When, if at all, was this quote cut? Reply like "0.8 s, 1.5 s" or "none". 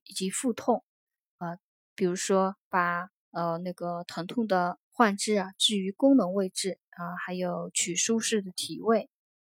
3.2 s, 4.8 s, 6.9 s